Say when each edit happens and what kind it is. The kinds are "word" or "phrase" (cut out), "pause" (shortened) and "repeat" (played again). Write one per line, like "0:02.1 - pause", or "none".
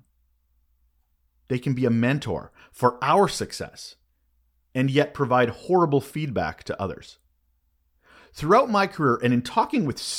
none

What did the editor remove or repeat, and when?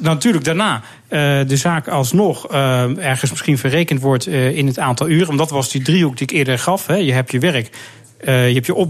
none

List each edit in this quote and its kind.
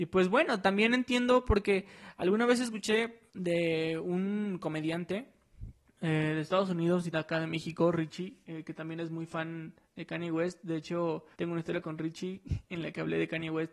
0:03.3 - pause
0:05.9 - pause
0:07.1 - word
0:08.4 - pause
0:09.8 - pause
0:11.3 - pause

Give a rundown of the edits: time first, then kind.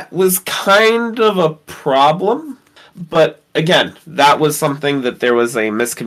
none

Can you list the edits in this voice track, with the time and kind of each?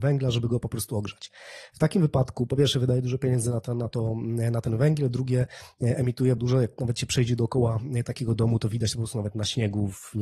0:06.4 - word

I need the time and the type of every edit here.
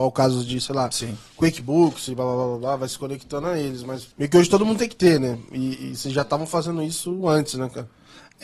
0:04.1 - pause

